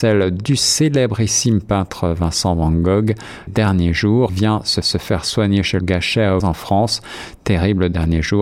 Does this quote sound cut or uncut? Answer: cut